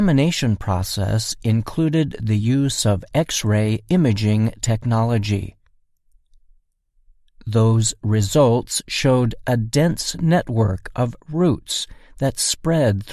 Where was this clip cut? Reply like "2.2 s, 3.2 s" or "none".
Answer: none